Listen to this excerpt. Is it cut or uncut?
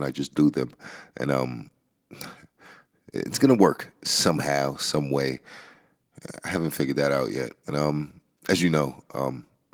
uncut